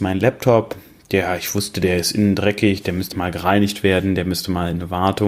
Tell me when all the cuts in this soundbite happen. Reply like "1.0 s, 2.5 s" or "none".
3.1 s